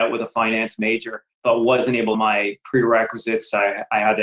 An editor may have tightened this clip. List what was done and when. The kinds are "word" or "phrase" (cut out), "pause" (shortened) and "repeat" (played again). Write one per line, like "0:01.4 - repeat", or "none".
0:01.3 - pause
0:02.1 - phrase

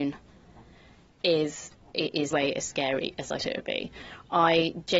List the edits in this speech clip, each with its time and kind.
0:01.9 - word
0:02.3 - word
0:03.4 - word

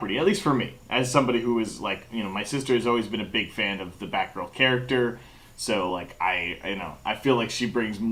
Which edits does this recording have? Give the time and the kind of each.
none

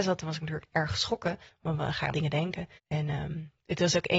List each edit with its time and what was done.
0:02.1 - word
0:02.8 - pause

